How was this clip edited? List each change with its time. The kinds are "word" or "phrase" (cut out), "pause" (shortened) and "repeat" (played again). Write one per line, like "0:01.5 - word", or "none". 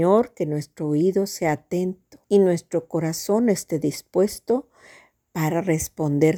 0:02.2 - pause

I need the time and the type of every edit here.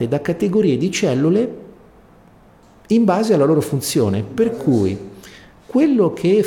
none

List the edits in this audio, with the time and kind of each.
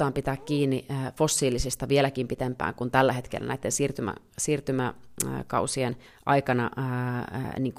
0:06.1 - pause

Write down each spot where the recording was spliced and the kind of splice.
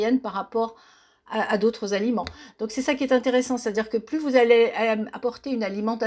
none

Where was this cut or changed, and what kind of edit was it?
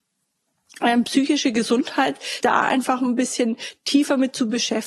0:02.4 - word

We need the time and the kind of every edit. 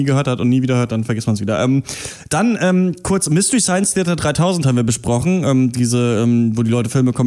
none

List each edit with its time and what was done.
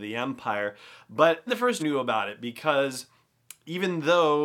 0:01.5 - word
0:01.8 - word

